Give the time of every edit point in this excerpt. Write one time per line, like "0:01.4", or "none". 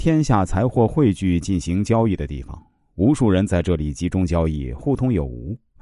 none